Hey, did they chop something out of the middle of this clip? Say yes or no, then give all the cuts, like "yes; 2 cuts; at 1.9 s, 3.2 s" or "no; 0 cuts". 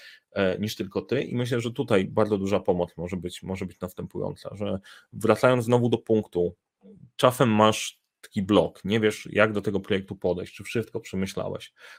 no; 0 cuts